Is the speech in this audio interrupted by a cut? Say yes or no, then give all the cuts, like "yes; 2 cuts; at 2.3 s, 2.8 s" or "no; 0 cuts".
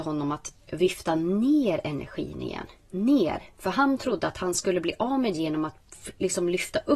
yes; 2 cuts; at 3.5 s, 5.3 s